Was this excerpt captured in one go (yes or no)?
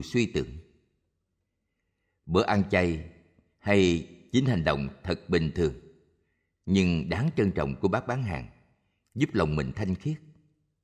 yes